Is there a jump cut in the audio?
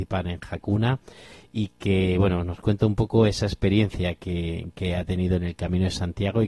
no; 0 cuts

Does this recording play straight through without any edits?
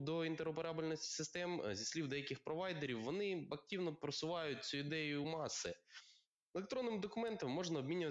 yes; 0 cuts

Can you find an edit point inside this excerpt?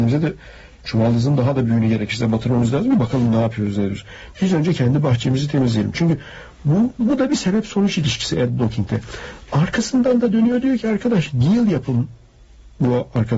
no; 0 cuts

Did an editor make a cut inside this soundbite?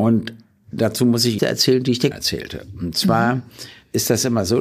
yes; 2 cuts; at 1.4 s, 2.1 s

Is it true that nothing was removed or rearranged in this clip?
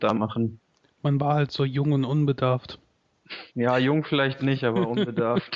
no; 1 cut; at 3.5 s

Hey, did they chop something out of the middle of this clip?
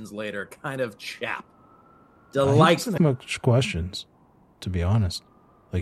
yes; 1 cut; at 3.0 s

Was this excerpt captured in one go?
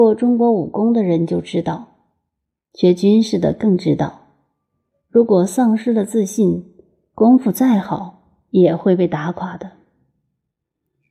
yes; 0 cuts

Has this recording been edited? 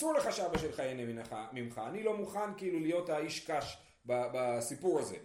no; 0 cuts

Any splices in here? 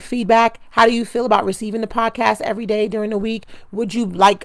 no; 0 cuts

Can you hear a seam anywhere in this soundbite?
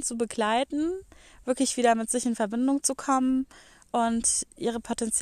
no; 0 cuts

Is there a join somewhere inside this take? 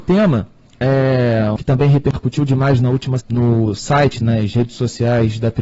yes; 3 cuts; at 1.6 s, 3.2 s, 4.2 s

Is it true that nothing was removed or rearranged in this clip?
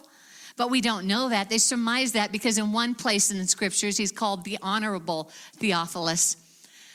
yes; 0 cuts

